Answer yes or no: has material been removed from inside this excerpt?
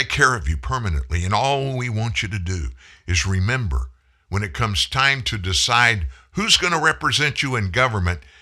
no